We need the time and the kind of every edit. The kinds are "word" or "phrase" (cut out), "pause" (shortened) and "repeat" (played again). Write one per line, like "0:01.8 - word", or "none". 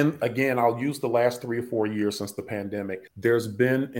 0:03.1 - pause